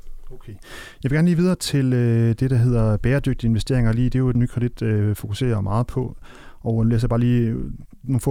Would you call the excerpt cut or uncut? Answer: cut